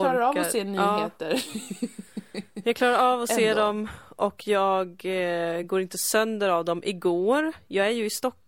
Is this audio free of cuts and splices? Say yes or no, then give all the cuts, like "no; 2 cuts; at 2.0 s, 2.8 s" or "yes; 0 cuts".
yes; 0 cuts